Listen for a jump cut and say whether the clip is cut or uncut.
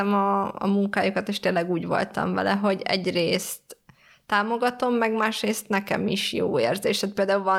uncut